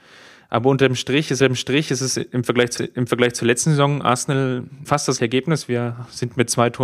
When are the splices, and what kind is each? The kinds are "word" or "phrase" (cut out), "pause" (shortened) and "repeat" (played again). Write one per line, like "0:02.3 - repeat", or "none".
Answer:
0:01.4 - repeat
0:02.8 - repeat
0:04.8 - word
0:05.2 - word